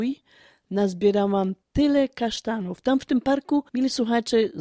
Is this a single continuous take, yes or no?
no